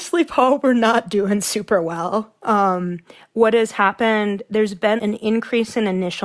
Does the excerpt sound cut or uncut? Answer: cut